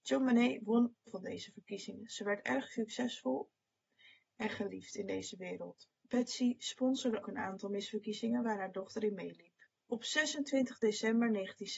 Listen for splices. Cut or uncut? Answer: cut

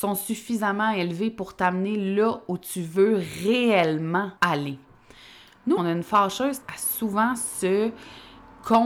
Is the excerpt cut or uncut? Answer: cut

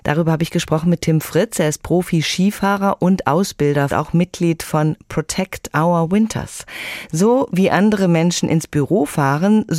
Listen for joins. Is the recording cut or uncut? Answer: cut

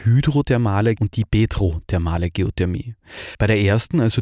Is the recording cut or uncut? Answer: cut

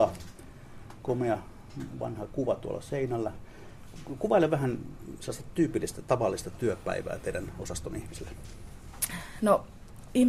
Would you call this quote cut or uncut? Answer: uncut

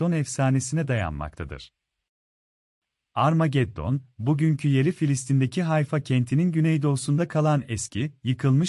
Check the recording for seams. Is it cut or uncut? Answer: uncut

